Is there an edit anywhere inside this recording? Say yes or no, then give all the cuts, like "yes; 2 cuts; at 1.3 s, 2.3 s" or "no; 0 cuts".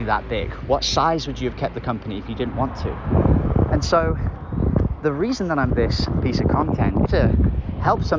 yes; 2 cuts; at 5.7 s, 7.1 s